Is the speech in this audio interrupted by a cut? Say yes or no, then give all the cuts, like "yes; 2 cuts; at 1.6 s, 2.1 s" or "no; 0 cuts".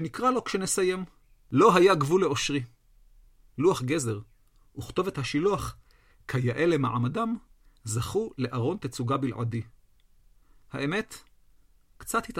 no; 0 cuts